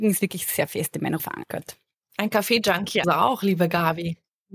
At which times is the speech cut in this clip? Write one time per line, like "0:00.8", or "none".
0:01.2
0:03.0